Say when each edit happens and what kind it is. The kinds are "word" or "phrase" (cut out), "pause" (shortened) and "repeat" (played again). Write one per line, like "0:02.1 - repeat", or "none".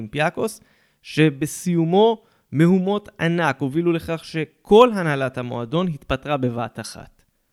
none